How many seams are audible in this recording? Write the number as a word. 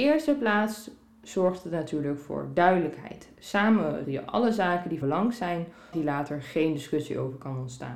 three